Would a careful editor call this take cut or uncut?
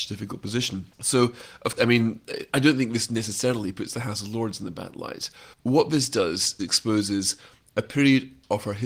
cut